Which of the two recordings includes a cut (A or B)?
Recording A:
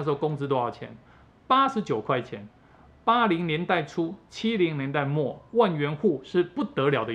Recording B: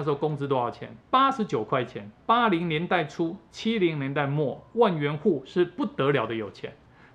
B